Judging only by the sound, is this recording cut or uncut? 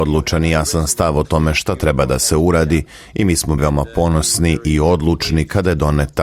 cut